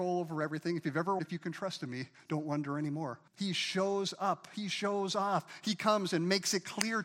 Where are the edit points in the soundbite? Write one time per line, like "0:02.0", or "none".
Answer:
0:01.2
0:03.3